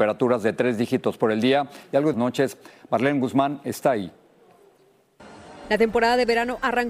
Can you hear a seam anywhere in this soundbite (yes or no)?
yes